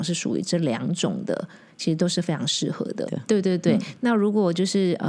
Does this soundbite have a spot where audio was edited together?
yes; 1 cut; at 3.1 s

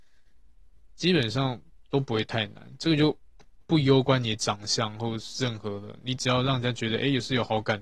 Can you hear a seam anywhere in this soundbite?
yes; 1 cut; at 3.6 s

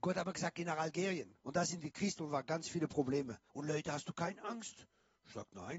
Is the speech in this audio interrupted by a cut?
yes; 3 cuts; at 1.4 s, 2.2 s, 3.5 s

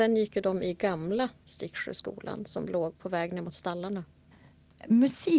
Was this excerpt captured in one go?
yes; 0 cuts

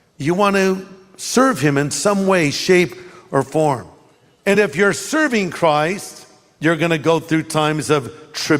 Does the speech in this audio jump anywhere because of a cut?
no; 0 cuts

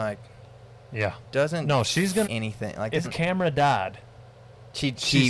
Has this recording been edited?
yes; 2 cuts; at 2.2 s, 3.0 s

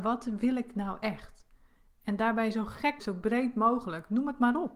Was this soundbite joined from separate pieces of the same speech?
yes; 1 cut; at 3.0 s

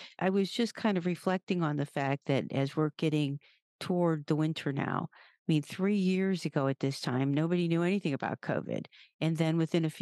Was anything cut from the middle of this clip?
no; 0 cuts

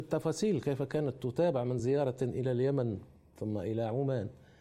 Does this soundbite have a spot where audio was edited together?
no; 0 cuts

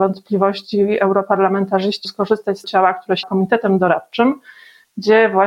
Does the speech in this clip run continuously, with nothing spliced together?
no; 3 cuts; at 2.0 s, 2.6 s, 3.2 s

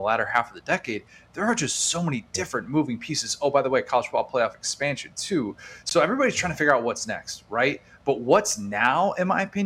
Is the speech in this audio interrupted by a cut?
no; 0 cuts

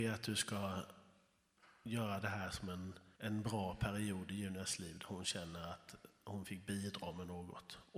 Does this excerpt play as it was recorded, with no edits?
no; 1 cut; at 3.1 s

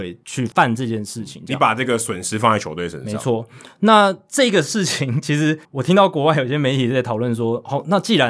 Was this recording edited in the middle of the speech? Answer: yes; 1 cut; at 5.6 s

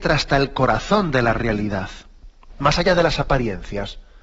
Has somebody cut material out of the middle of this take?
no; 0 cuts

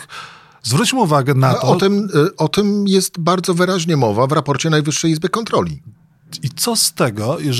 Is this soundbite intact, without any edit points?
yes; 0 cuts

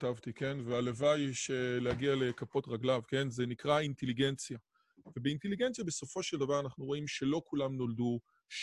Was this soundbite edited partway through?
no; 0 cuts

